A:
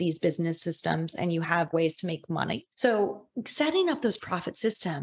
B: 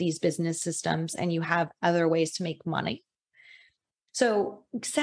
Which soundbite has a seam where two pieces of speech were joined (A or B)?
A